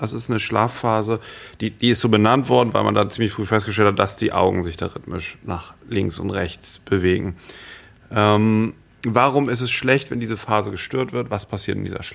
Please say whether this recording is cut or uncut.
uncut